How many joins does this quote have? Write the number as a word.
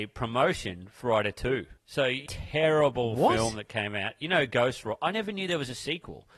three